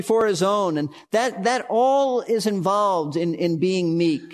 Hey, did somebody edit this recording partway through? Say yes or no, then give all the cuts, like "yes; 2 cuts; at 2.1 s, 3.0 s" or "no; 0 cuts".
no; 0 cuts